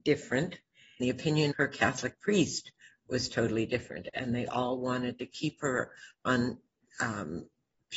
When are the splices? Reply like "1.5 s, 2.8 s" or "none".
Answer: 1.0 s, 1.5 s